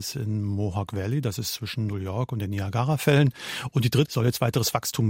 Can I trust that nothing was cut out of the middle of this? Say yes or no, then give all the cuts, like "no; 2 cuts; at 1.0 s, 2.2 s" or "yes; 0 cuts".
no; 1 cut; at 4.0 s